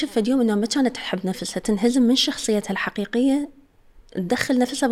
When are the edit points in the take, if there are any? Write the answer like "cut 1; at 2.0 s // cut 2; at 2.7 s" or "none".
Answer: none